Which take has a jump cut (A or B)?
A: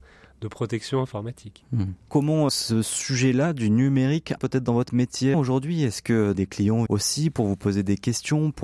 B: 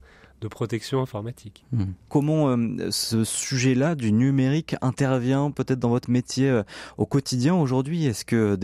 A